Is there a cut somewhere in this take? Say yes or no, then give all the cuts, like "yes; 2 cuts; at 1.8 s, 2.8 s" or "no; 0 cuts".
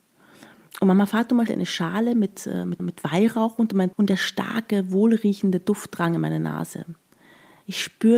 yes; 3 cuts; at 1.5 s, 2.8 s, 3.9 s